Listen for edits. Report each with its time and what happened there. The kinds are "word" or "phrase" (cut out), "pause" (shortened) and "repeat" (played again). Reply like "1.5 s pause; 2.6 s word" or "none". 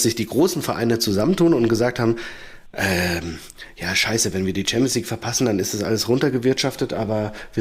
none